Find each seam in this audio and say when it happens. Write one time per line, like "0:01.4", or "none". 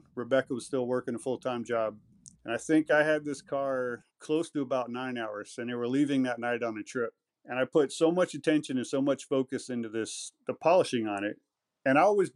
0:02.3
0:04.1
0:07.3